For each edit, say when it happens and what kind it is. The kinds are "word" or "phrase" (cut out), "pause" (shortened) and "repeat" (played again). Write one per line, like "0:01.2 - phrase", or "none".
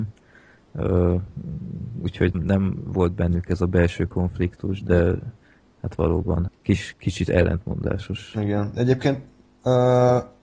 0:02.3 - phrase
0:06.5 - word

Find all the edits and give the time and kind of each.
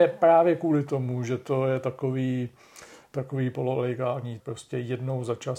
0:04.4 - word

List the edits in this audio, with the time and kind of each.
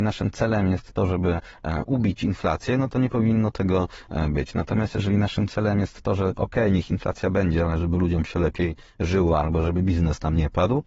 none

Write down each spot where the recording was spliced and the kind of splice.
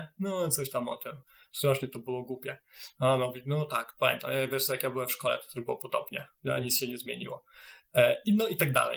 none

